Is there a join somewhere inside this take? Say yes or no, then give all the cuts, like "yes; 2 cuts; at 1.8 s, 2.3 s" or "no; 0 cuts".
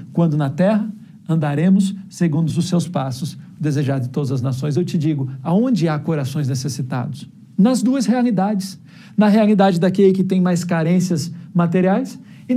no; 0 cuts